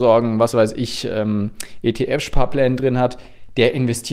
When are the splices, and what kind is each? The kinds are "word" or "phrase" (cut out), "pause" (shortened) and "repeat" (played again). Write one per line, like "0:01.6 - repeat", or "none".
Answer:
none